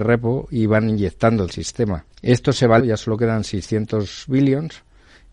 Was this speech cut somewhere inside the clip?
yes; 3 cuts; at 1.5 s, 2.1 s, 2.8 s

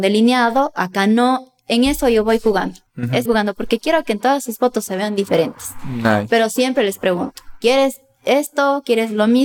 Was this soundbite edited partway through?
yes; 2 cuts; at 2.9 s, 3.3 s

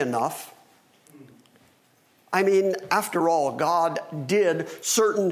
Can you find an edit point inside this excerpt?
no; 0 cuts

